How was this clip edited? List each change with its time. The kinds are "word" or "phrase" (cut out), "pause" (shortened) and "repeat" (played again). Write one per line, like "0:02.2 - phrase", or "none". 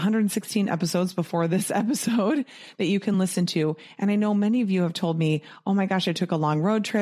none

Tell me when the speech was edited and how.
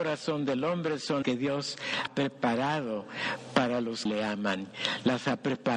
0:01.2 - word
0:02.1 - word
0:04.1 - word

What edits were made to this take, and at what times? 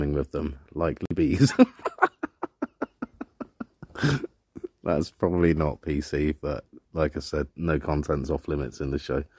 0:06.8 - pause
0:07.5 - pause

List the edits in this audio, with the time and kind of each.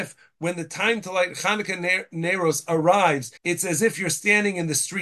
0:03.4 - pause

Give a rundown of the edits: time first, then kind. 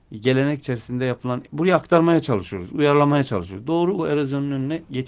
0:01.4 - word
0:04.0 - word

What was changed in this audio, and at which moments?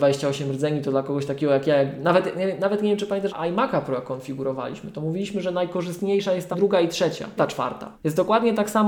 0:03.3 - word
0:06.5 - word
0:07.4 - word
0:07.9 - pause

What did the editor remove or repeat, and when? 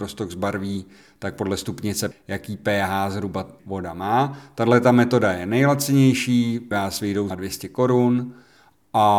0:02.1 - word
0:03.6 - word
0:06.7 - word
0:07.3 - word

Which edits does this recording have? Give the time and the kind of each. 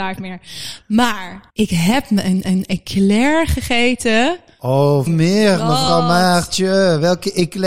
0:01.5 - pause
0:02.4 - repeat
0:05.1 - phrase

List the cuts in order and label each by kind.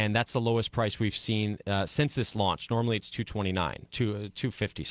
0:03.9 - phrase

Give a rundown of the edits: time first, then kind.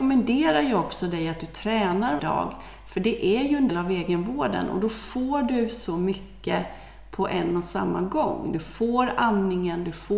0:02.2 - word
0:03.7 - word

